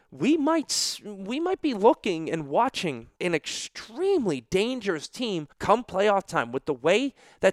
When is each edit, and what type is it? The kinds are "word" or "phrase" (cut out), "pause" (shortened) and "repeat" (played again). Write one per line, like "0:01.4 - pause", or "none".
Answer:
0:03.1 - pause
0:05.5 - pause